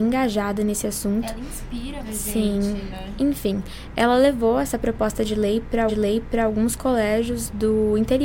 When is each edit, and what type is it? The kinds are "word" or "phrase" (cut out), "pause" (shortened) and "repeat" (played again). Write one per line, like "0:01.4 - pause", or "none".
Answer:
0:02.0 - word
0:05.9 - repeat